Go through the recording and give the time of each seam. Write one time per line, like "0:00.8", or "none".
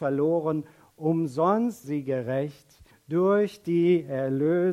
0:01.8
0:02.9